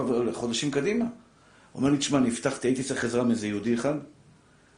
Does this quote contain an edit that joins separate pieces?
yes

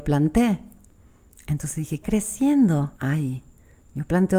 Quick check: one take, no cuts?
no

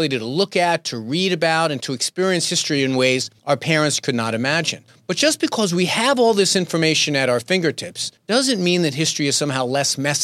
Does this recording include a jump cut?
yes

